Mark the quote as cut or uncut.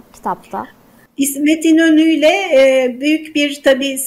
uncut